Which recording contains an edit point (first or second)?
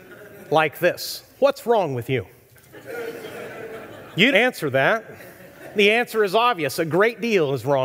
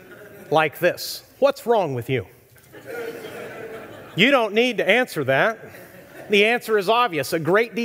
first